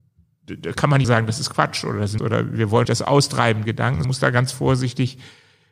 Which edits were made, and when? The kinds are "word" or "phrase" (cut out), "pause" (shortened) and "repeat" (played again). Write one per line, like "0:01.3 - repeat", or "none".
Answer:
0:01.0 - word
0:02.2 - word
0:02.9 - word
0:03.7 - word
0:04.0 - word